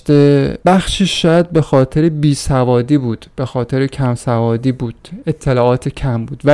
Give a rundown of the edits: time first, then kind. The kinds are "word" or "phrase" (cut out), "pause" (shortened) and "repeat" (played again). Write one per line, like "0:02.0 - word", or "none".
none